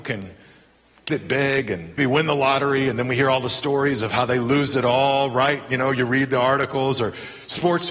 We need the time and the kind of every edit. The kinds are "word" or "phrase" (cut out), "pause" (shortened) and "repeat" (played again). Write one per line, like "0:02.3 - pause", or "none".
0:01.1 - word
0:02.0 - word